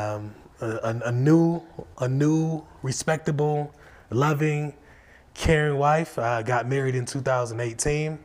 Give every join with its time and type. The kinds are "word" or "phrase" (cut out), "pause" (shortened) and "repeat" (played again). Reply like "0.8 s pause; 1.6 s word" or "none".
none